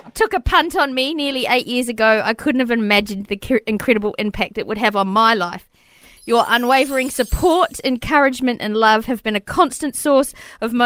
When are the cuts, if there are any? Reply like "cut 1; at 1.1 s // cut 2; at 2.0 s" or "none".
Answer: none